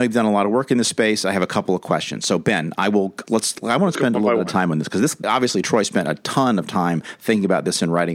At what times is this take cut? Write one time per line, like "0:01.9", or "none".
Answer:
0:03.3
0:05.2